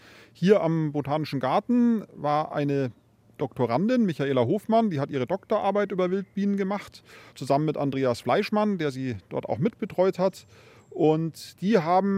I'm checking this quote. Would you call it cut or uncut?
uncut